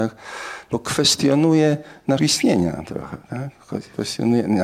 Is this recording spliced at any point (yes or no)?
yes